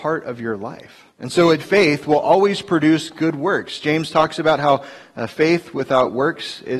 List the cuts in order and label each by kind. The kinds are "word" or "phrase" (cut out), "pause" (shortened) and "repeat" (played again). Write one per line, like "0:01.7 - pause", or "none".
0:01.1 - pause
0:01.6 - word